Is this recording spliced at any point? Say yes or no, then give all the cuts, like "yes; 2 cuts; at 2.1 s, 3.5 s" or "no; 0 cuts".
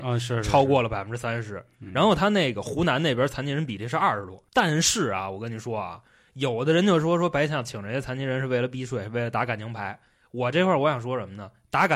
yes; 1 cut; at 4.5 s